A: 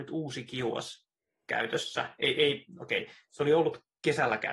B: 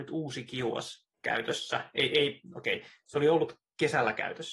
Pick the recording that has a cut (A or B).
B